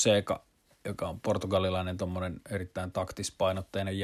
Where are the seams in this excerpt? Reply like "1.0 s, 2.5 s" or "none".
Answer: none

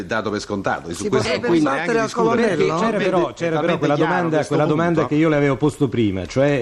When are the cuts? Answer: none

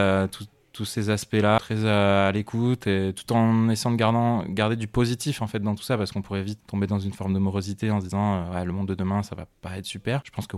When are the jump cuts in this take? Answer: 6.6 s

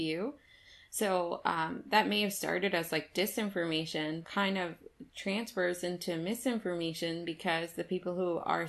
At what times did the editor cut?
4.2 s

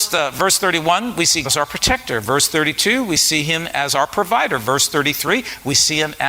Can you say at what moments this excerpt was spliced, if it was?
1.4 s

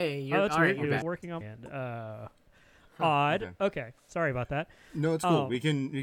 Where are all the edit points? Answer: 1.0 s, 1.4 s

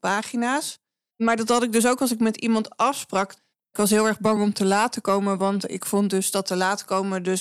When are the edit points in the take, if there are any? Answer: none

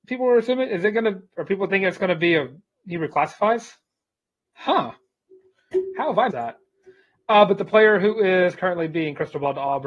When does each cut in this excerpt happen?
6.3 s

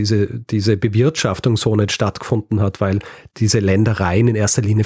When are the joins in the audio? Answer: none

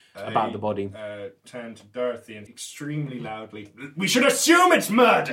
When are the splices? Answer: 2.5 s

